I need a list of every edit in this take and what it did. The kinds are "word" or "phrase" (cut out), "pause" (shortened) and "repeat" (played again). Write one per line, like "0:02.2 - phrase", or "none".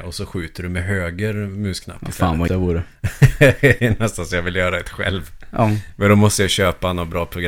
0:02.5 - word
0:03.8 - word